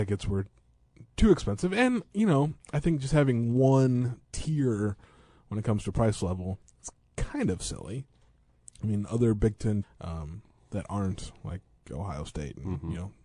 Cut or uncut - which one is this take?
cut